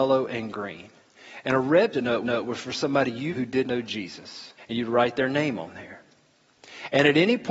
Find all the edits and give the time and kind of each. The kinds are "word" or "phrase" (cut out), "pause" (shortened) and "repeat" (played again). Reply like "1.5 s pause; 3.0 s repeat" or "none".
1.9 s word; 2.2 s repeat; 3.3 s word; 3.6 s word; 4.6 s pause